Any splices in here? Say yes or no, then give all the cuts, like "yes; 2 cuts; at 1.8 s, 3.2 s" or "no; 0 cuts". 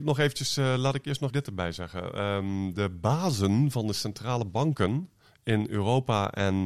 yes; 1 cut; at 1.3 s